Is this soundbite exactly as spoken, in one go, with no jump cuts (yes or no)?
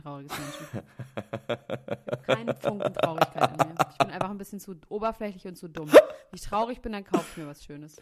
yes